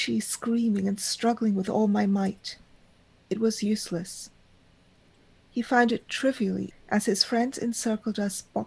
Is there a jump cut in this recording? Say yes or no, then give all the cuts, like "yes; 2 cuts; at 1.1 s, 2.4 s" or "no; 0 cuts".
yes; 1 cut; at 6.7 s